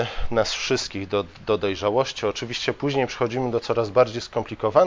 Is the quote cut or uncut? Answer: uncut